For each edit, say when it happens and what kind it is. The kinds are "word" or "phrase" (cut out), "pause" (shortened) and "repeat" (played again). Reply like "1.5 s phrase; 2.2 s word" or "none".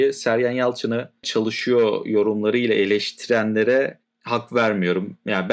1.2 s phrase